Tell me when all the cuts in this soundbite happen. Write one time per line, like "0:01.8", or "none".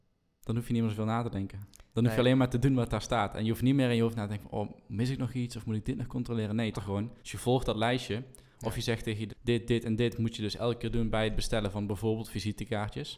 0:06.7
0:07.2
0:09.3